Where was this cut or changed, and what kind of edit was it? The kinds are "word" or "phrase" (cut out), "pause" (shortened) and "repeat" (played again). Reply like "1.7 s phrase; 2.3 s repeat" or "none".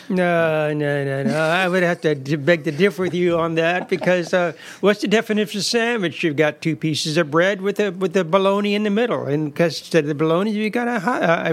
none